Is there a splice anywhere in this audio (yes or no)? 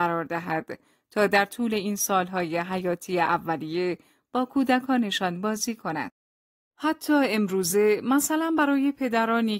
no